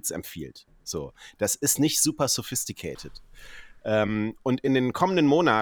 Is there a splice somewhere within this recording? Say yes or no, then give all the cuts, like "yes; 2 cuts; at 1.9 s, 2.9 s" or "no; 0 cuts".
no; 0 cuts